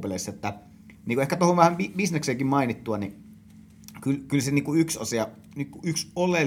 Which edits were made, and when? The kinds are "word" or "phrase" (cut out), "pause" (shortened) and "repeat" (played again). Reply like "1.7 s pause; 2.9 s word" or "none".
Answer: none